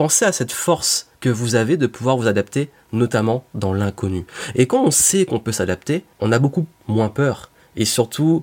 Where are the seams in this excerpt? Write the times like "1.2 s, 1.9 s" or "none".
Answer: 1.1 s, 6.1 s